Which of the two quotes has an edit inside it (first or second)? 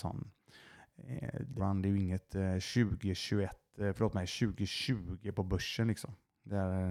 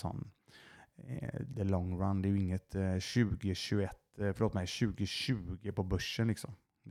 first